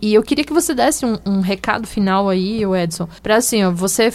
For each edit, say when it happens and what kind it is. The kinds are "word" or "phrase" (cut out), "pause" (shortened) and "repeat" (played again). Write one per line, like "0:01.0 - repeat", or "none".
0:03.2 - pause